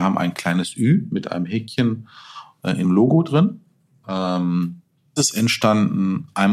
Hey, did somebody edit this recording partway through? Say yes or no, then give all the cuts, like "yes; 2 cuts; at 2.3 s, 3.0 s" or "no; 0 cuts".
yes; 2 cuts; at 2.8 s, 5.2 s